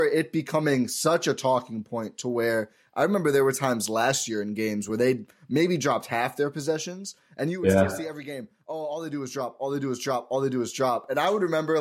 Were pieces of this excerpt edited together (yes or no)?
no